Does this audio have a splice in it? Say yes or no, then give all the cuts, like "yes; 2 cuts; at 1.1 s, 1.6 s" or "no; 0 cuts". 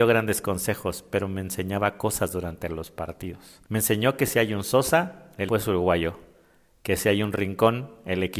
yes; 2 cuts; at 3.6 s, 5.5 s